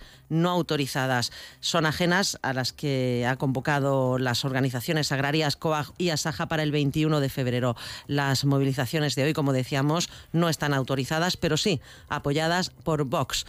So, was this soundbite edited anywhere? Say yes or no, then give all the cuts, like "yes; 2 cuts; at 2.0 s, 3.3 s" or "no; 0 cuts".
yes; 1 cut; at 5.9 s